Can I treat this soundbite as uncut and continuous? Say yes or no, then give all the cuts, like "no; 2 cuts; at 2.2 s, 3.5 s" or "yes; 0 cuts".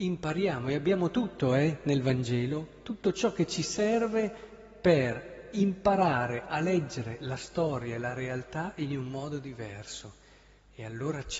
yes; 0 cuts